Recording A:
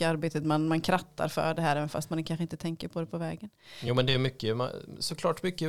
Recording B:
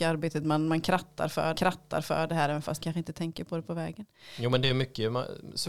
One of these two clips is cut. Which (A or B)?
B